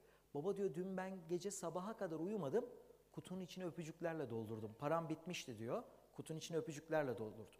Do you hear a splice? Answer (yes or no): no